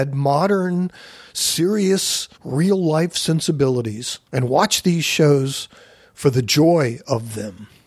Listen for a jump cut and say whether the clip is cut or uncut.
cut